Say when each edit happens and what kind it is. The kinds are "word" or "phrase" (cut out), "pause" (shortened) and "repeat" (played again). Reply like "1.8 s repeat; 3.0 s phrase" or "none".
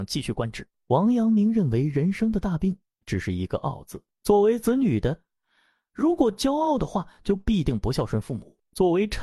none